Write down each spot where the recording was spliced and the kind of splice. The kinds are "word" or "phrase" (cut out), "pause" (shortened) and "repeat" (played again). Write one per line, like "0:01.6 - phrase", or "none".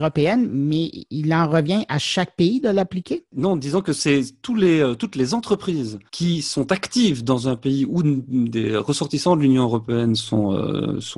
0:06.1 - pause
0:08.0 - word

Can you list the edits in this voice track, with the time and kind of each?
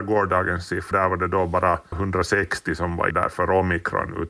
0:00.9 - word
0:01.9 - word
0:03.1 - word

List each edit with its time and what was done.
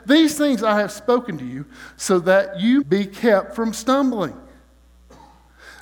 0:02.8 - word

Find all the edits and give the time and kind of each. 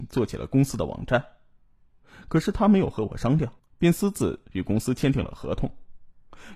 0:03.6 - pause

